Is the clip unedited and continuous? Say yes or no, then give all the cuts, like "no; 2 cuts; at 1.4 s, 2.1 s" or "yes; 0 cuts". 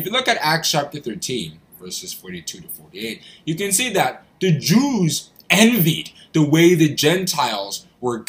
yes; 0 cuts